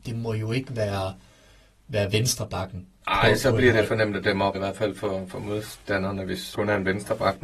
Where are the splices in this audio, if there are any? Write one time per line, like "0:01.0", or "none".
0:04.5
0:06.5